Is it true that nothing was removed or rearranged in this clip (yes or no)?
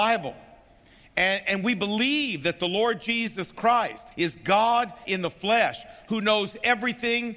no